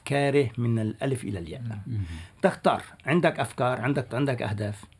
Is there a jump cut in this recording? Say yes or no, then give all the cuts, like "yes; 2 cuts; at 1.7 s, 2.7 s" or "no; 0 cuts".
yes; 1 cut; at 4.1 s